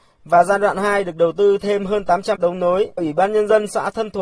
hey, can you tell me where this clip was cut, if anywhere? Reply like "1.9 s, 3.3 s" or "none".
2.4 s, 3.0 s